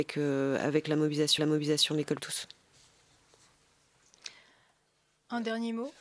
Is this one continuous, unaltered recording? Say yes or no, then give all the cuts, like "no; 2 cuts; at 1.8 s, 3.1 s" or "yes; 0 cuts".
no; 2 cuts; at 1.4 s, 2.2 s